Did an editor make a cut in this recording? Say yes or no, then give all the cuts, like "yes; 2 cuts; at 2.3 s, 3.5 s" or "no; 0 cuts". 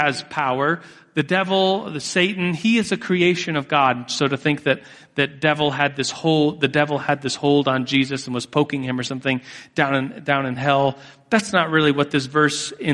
no; 0 cuts